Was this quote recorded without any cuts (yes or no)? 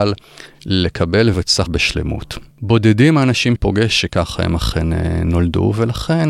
no